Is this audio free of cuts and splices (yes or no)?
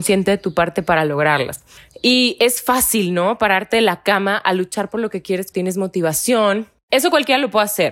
no